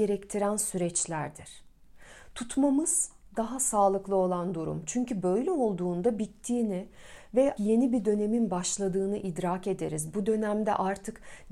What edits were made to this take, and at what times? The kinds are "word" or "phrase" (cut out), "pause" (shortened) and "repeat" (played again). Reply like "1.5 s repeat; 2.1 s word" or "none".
6.2 s phrase; 7.6 s word